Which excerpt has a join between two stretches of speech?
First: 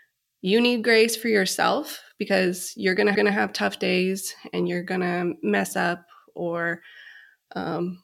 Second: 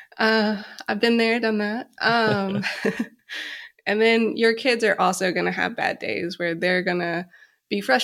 first; 1 cut; at 3.1 s

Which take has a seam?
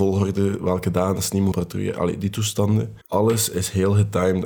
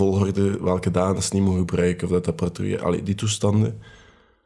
first; 2 cuts; at 1.5 s, 3.0 s

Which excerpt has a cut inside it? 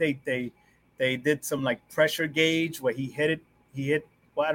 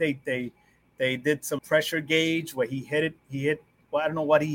second; 2 cuts; at 1.6 s, 3.2 s

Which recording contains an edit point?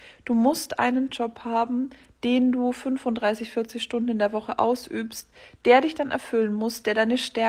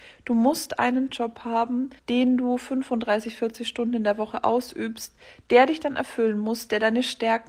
second; 1 cut; at 2.0 s

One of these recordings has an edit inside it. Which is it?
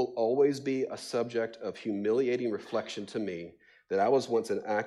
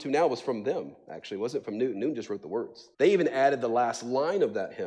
second; 1 cut; at 2.9 s

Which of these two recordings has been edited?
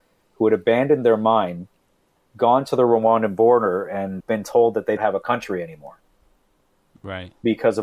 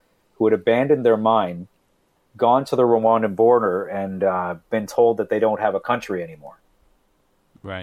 first; 2 cuts; at 4.2 s, 5.0 s

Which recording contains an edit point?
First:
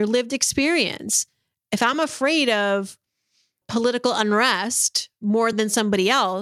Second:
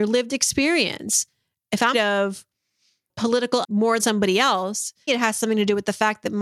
second; 4 cuts; at 1.9 s, 3.6 s, 4.0 s, 5.1 s

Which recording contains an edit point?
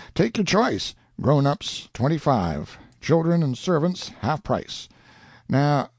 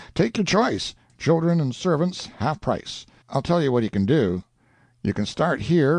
second; 2 cuts; at 1.1 s, 3.2 s

